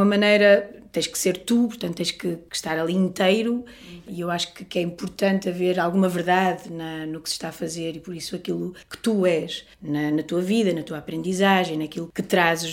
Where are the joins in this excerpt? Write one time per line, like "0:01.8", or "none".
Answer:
0:08.8
0:09.7

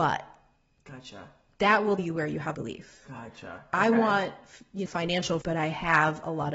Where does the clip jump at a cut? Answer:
0:02.0
0:02.5
0:04.9
0:05.4

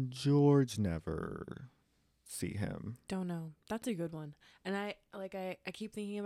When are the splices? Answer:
none

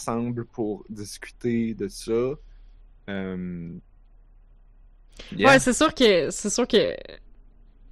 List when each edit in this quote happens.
none

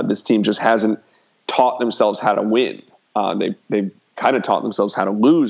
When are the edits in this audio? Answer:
none

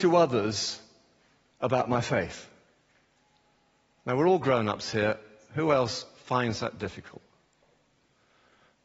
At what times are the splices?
none

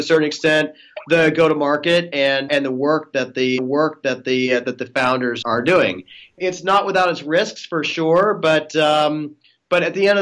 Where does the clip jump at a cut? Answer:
0:02.5
0:03.6
0:05.4

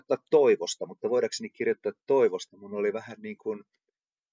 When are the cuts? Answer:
none

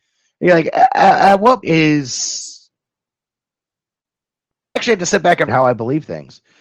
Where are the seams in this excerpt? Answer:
0:01.6
0:04.8
0:05.5

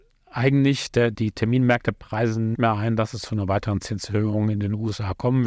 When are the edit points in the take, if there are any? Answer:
0:01.1
0:02.5

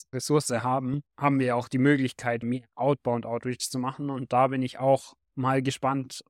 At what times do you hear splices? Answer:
0:01.1
0:02.4
0:05.2

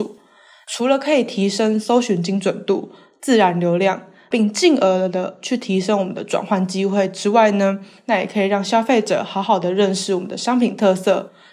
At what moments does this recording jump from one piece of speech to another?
none

